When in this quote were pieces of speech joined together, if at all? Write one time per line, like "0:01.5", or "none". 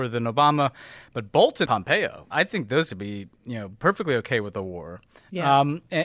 0:01.7
0:02.3
0:02.9

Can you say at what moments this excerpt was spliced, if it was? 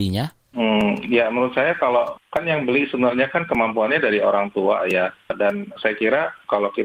none

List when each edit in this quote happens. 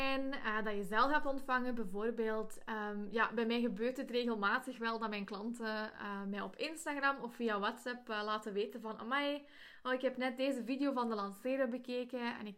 none

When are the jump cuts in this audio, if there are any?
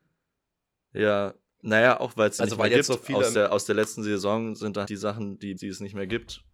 0:02.4
0:04.8
0:05.6

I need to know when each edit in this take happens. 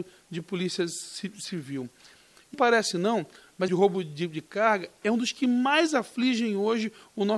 0:02.5
0:03.7

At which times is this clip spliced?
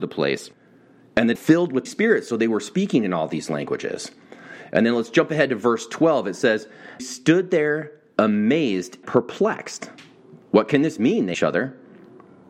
0:01.4
0:01.9
0:07.0
0:09.0
0:11.3

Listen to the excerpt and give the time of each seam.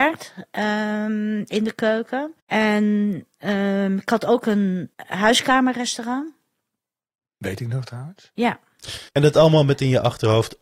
0:02.4
0:04.9
0:09.1

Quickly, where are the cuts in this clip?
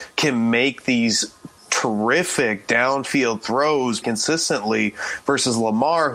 0:04.0

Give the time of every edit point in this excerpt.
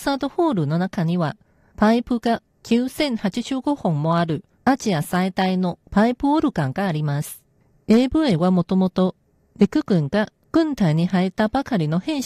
none

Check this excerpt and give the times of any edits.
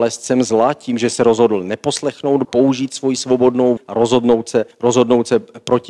0:02.4
0:03.8
0:04.7

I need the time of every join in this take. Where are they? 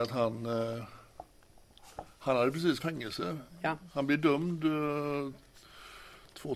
0:02.8

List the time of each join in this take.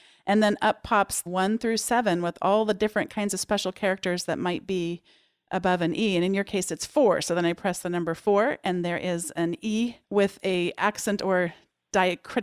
0:01.3
0:10.0

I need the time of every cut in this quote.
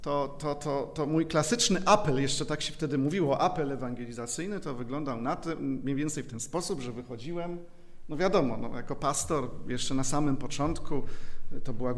none

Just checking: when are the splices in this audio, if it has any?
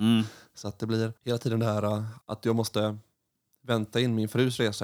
0:01.2
0:02.2

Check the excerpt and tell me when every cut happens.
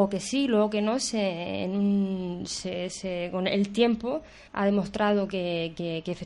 0:04.5

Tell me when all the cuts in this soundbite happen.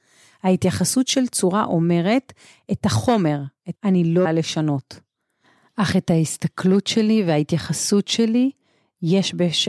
0:03.8
0:04.2

